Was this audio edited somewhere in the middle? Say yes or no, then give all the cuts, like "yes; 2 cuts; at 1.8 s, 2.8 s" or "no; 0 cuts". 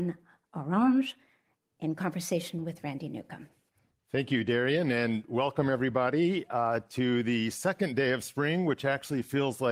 no; 0 cuts